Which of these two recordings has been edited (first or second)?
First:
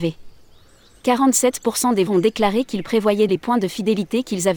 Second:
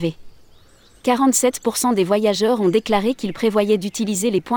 first